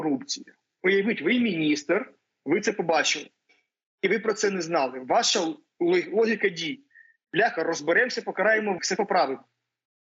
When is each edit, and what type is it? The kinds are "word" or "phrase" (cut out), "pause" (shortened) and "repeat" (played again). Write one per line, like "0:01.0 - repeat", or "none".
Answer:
0:08.8 - word